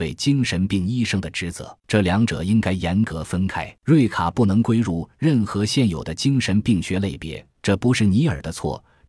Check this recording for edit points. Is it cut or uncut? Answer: cut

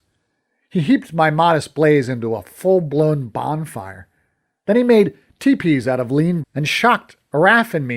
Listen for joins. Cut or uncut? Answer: cut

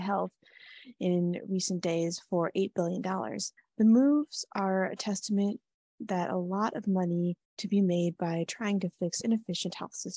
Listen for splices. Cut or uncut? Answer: cut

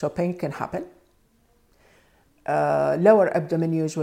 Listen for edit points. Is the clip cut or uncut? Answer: uncut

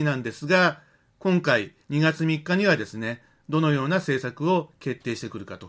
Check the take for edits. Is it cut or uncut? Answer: cut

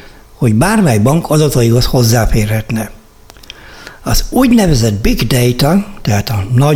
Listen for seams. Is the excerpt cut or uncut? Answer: uncut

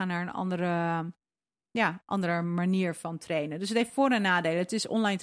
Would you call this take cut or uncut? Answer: uncut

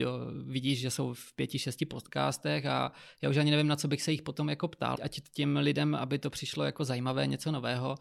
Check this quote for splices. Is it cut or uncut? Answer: cut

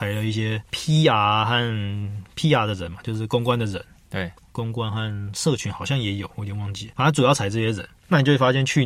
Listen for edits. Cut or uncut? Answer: uncut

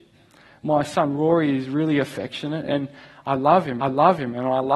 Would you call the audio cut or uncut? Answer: cut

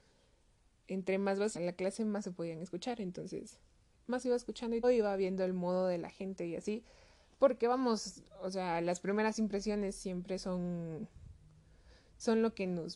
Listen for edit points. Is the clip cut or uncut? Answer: cut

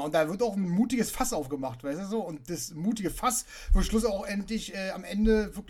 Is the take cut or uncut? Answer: uncut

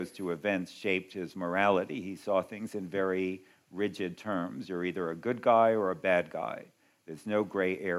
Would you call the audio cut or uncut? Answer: uncut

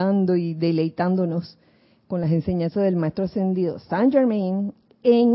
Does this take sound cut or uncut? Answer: uncut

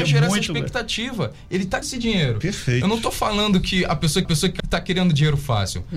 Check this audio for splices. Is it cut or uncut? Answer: cut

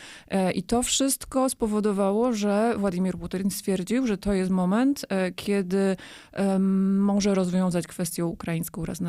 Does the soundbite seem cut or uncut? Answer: uncut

